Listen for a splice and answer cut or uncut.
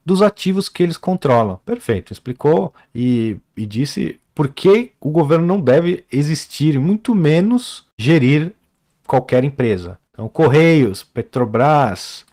cut